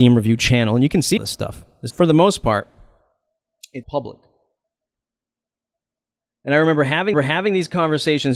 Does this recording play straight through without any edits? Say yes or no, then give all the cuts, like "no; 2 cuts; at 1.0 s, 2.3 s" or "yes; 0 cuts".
no; 4 cuts; at 1.2 s, 1.9 s, 3.8 s, 7.1 s